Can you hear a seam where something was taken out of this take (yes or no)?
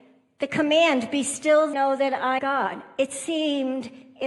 yes